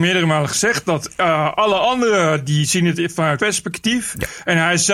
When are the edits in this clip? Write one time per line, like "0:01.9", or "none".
0:03.4